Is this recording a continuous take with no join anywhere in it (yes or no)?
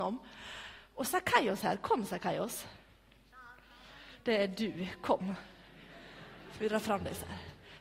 yes